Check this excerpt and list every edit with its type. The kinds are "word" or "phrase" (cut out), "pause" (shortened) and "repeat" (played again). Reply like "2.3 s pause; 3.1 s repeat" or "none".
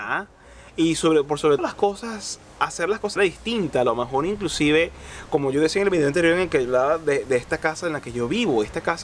1.6 s word; 3.2 s word